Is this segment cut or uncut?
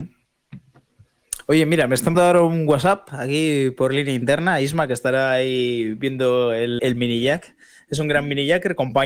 cut